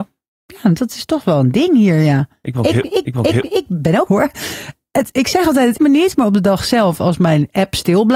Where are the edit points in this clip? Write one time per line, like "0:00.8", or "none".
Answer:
0:03.1
0:04.1
0:05.8